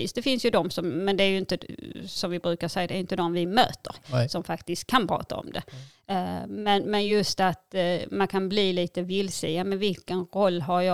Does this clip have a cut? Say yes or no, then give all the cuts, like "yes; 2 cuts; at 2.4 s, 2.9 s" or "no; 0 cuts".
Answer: no; 0 cuts